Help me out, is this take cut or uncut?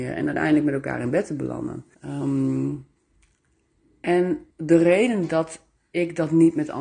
cut